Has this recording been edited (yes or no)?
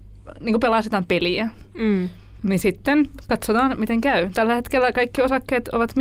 no